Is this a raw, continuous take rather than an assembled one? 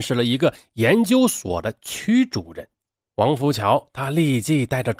yes; 0 cuts

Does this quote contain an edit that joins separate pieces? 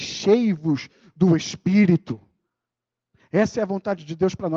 no; 0 cuts

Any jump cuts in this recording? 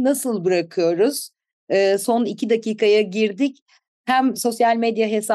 no; 0 cuts

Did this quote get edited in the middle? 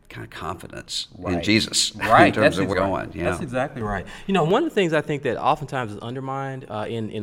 yes; 1 cut; at 2.7 s

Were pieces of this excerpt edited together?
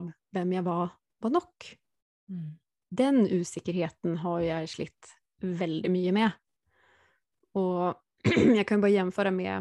no; 0 cuts

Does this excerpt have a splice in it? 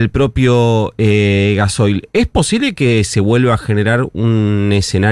no; 0 cuts

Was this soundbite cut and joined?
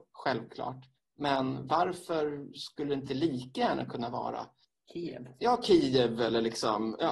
no; 0 cuts

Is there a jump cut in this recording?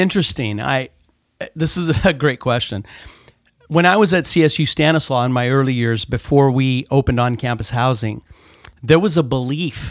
no; 0 cuts

